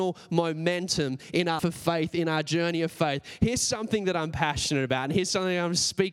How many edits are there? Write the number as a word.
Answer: one